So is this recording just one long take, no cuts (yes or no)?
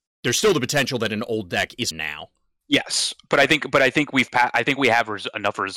no